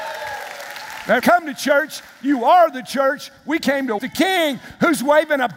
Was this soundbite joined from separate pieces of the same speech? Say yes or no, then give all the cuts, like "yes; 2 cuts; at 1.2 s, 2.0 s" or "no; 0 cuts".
yes; 2 cuts; at 1.2 s, 4.0 s